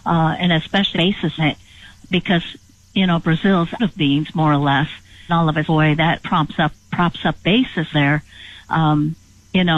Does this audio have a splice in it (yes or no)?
yes